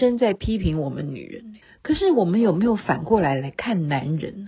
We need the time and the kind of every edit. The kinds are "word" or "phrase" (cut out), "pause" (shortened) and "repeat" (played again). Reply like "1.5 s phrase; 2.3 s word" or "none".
1.6 s pause